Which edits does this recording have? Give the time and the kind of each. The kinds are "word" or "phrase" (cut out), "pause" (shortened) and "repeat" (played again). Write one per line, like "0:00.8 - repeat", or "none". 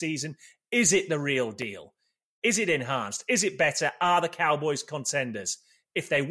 none